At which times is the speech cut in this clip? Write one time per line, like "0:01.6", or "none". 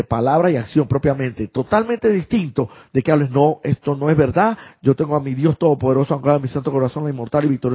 none

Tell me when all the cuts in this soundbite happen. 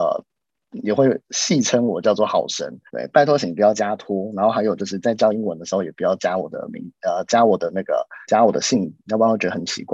0:02.9
0:08.2

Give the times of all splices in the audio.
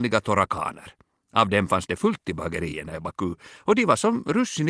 none

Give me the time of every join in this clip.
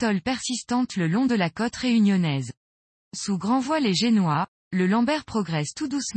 none

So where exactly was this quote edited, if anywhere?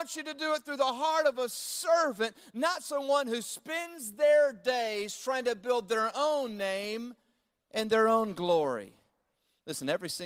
none

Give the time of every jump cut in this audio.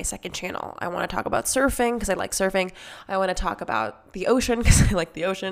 none

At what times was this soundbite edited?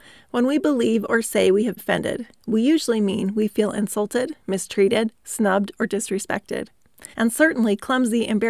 0:01.8
0:07.1

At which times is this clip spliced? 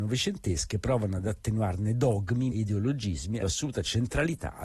0:02.5
0:03.4

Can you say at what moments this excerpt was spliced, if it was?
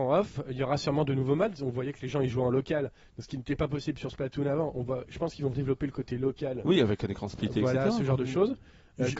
0:05.5

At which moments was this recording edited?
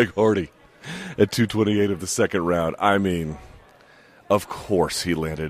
none

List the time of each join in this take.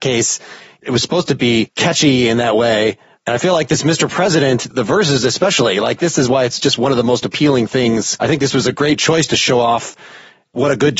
none

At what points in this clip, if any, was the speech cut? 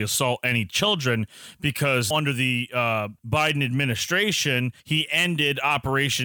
0:02.1
0:03.2
0:04.8

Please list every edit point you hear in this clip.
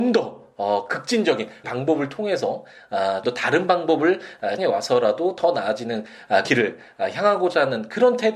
0:01.6
0:03.2
0:04.6
0:06.4

